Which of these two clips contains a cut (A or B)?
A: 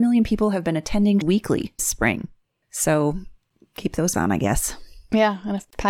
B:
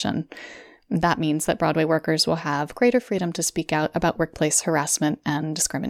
A